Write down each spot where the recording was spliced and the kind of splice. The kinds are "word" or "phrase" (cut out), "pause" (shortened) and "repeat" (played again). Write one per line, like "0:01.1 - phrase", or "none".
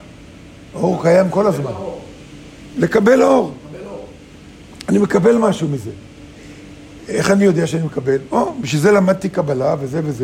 none